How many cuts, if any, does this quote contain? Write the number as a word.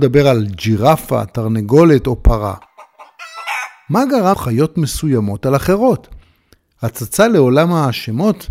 one